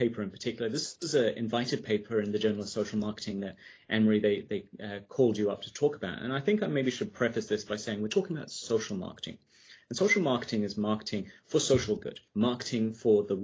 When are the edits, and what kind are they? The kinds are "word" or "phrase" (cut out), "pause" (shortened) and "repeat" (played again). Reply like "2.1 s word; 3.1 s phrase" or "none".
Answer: 12.3 s pause